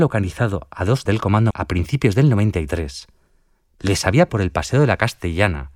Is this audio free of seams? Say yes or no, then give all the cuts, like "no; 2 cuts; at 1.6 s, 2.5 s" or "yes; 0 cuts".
no; 3 cuts; at 1.1 s, 1.5 s, 4.3 s